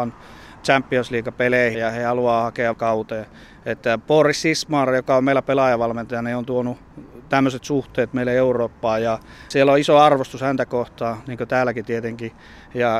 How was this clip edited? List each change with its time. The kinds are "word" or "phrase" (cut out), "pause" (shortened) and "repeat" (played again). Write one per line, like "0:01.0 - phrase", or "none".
0:01.7 - word
0:02.7 - word